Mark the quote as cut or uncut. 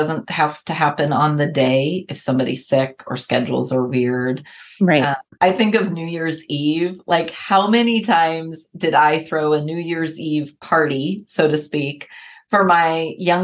uncut